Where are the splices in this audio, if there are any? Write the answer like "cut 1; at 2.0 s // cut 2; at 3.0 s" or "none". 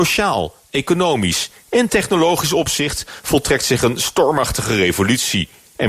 none